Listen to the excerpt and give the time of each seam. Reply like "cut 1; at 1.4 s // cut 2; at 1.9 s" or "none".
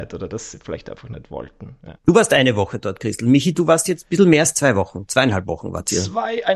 cut 1; at 2.0 s